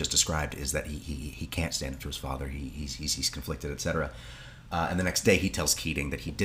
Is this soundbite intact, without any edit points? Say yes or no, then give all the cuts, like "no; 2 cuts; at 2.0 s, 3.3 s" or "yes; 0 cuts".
yes; 0 cuts